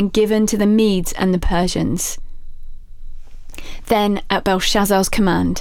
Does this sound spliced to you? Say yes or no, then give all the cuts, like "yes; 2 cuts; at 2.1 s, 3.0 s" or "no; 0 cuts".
no; 0 cuts